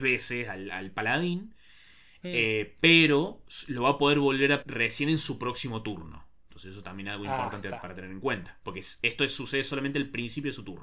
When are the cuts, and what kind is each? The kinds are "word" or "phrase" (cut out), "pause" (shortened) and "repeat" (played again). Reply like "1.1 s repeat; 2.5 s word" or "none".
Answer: 4.6 s word